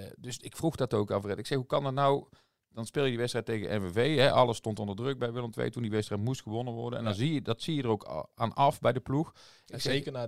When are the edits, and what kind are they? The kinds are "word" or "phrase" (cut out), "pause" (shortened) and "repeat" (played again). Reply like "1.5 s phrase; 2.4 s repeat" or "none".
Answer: 5.2 s word